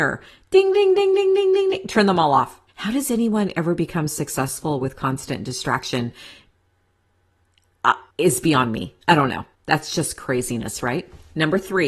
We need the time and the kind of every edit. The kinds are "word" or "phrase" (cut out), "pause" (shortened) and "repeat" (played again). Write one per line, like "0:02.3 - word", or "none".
0:02.7 - pause
0:08.1 - pause
0:09.0 - pause
0:09.5 - pause